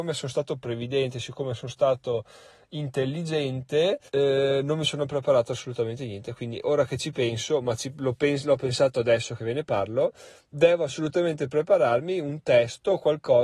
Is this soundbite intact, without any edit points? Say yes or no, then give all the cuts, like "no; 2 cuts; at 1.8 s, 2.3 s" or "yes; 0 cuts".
no; 1 cut; at 4.1 s